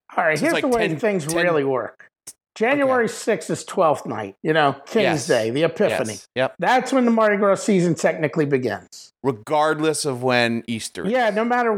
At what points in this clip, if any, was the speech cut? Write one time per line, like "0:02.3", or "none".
0:04.4
0:06.3
0:09.2